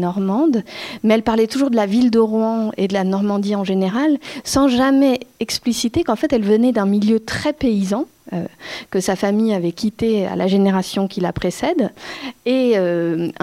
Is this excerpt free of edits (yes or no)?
yes